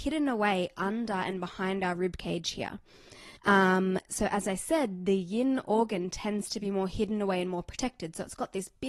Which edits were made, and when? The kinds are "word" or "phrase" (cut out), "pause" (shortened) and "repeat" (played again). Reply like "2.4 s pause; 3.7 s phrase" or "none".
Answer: 3.4 s pause